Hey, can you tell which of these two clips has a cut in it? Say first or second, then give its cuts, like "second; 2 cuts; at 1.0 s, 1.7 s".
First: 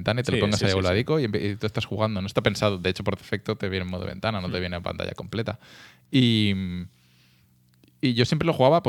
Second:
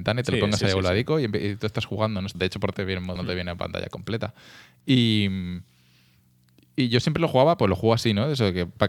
second; 3 cuts; at 2.3 s, 2.7 s, 3.2 s